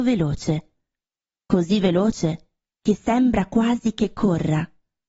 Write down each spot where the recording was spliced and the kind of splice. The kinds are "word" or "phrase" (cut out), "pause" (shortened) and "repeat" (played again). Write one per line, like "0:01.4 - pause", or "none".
none